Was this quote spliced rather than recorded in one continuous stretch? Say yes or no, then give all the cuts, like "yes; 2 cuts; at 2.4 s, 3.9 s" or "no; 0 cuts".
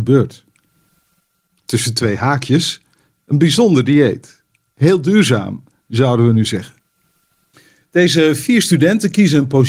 no; 0 cuts